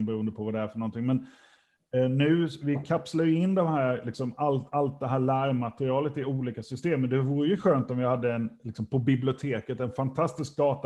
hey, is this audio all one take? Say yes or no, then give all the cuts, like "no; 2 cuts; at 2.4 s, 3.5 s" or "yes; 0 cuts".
yes; 0 cuts